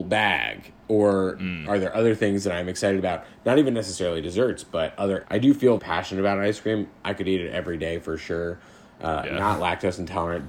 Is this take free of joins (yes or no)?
no